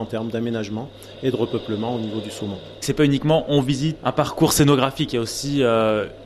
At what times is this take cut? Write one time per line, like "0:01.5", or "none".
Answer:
0:04.0